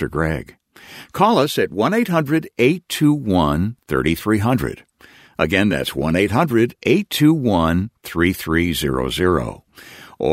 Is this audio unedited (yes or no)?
yes